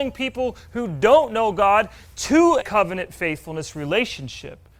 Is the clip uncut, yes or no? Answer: no